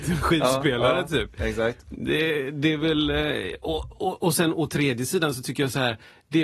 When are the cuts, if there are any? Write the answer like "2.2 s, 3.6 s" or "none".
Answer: none

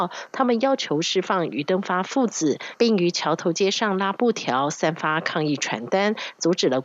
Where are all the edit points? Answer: 2.8 s

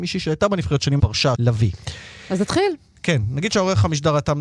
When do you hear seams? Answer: 1.0 s, 1.3 s

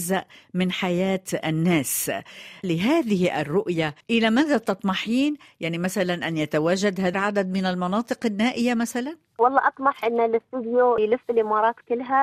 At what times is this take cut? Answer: 2.6 s, 4.0 s, 7.1 s

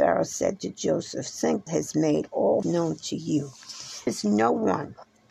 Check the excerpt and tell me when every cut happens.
1.7 s, 2.6 s, 4.1 s

